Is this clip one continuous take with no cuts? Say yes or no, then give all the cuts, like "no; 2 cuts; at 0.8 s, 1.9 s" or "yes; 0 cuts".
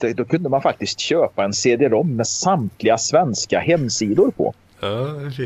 yes; 0 cuts